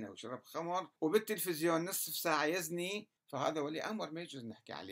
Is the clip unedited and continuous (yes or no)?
no